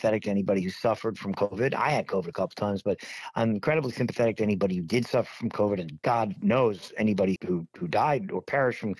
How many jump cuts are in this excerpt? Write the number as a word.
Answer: one